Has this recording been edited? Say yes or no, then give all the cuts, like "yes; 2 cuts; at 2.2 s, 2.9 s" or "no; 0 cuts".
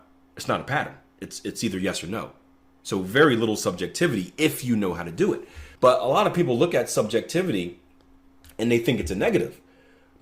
yes; 1 cut; at 5.8 s